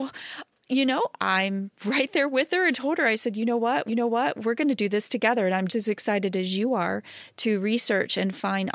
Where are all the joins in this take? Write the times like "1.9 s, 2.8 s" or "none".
1.8 s, 2.7 s, 3.9 s, 5.7 s